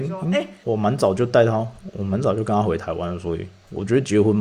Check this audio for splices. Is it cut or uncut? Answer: uncut